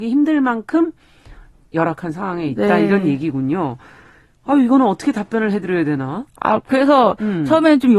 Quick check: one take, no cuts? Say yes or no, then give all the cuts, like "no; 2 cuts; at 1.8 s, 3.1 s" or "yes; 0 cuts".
yes; 0 cuts